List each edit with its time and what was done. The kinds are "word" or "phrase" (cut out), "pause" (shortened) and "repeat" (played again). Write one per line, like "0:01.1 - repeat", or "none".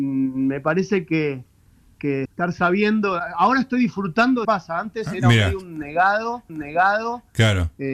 0:02.3 - word
0:04.4 - phrase
0:06.5 - repeat